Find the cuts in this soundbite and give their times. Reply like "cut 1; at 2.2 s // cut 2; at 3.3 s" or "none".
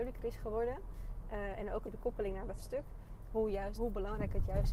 cut 1; at 1.8 s // cut 2; at 2.6 s // cut 3; at 3.8 s